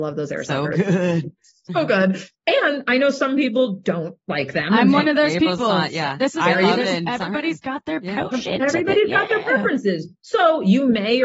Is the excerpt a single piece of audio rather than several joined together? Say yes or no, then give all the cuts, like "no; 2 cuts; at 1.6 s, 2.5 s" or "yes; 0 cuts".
yes; 0 cuts